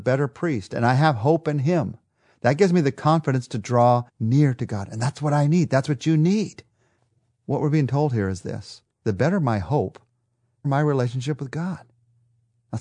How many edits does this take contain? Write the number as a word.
four